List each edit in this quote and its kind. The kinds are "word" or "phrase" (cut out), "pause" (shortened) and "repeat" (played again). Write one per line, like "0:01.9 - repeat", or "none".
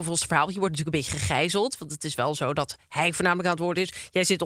none